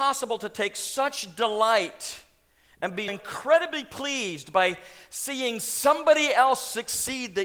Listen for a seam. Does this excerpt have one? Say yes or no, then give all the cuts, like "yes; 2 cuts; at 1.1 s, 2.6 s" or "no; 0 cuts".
yes; 1 cut; at 3.1 s